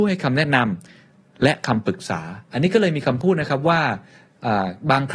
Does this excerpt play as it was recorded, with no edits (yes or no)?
no